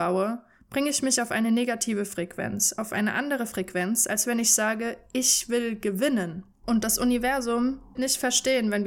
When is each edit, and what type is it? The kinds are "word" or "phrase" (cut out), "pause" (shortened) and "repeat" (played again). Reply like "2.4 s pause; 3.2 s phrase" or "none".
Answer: 8.0 s word